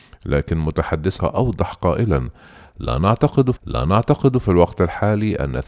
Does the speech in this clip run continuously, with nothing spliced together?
no; 2 cuts; at 1.2 s, 3.6 s

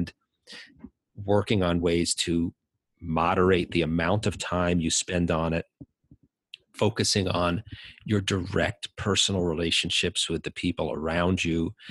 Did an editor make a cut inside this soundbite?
no; 0 cuts

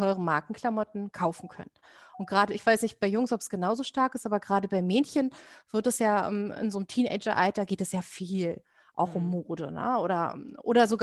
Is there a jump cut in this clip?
no; 0 cuts

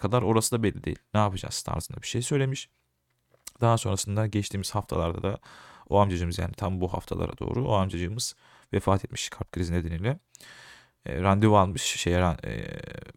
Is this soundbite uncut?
yes; 0 cuts

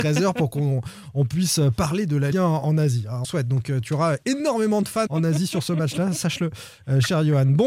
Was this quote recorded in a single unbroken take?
no; 3 cuts; at 2.3 s, 3.2 s, 5.1 s

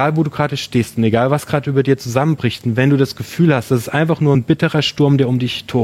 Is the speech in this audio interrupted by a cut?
no; 0 cuts

